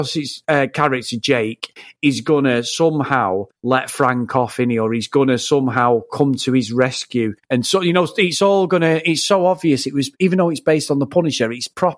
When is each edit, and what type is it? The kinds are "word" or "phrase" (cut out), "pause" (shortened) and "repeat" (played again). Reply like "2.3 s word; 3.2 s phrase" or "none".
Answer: 3.6 s pause; 7.4 s pause